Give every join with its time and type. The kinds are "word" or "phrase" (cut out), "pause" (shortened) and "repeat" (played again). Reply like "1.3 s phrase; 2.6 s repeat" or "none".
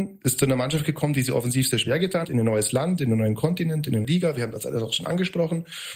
2.2 s word; 4.0 s word